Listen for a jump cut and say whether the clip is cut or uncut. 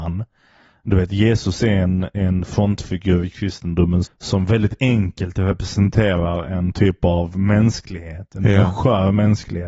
cut